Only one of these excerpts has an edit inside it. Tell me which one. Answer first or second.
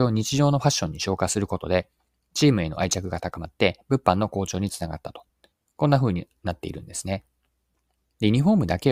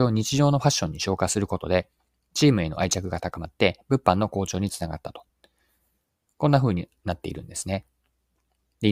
first